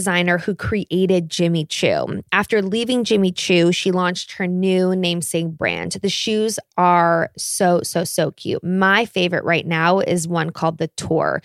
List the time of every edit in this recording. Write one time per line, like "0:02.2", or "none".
none